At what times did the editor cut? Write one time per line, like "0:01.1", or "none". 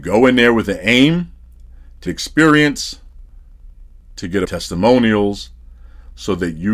0:02.1
0:04.4